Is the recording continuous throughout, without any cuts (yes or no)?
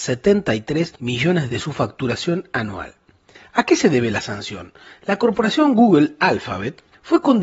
no